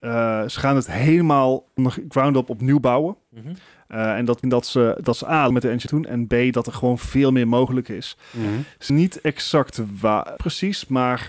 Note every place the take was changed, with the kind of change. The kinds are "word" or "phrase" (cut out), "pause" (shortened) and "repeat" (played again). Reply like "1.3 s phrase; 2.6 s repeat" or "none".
1.8 s word; 4.4 s word; 5.5 s word; 5.9 s word; 8.9 s word; 10.4 s word